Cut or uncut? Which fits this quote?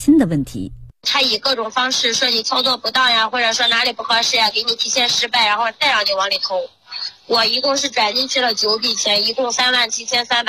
cut